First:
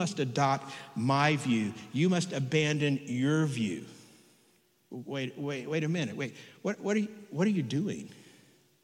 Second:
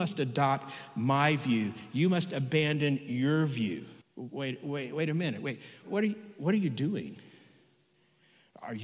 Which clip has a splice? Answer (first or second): second